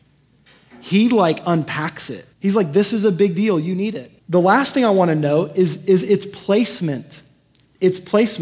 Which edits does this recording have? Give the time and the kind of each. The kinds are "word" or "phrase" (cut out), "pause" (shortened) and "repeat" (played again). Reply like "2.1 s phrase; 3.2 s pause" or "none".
2.3 s pause; 4.2 s pause